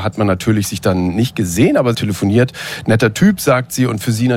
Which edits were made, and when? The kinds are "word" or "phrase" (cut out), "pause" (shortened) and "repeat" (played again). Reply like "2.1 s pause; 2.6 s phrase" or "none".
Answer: 1.9 s phrase